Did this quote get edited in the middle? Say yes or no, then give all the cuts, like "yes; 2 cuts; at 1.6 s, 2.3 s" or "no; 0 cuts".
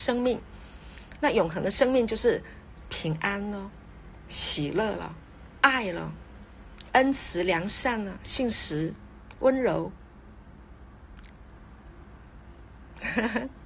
no; 0 cuts